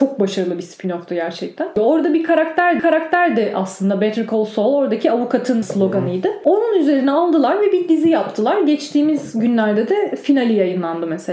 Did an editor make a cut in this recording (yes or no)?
yes